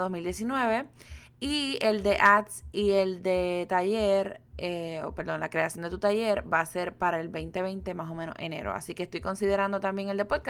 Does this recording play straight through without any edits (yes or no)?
no